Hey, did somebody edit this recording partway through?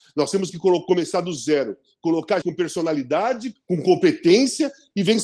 yes; 2 cuts; at 2.4 s, 3.6 s

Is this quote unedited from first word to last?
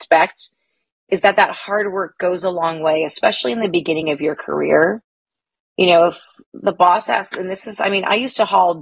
yes; 0 cuts

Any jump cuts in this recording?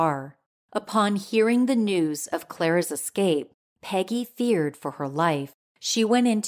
no; 0 cuts

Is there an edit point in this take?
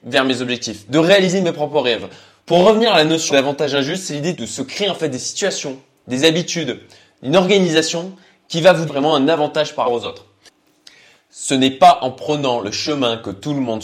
yes; 4 cuts; at 3.3 s, 4.3 s, 8.9 s, 9.8 s

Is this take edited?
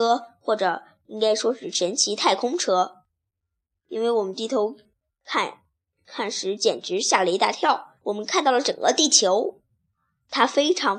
yes; 1 cut; at 8.0 s

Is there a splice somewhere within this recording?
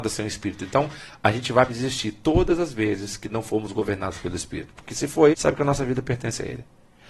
yes; 2 cuts; at 1.7 s, 5.3 s

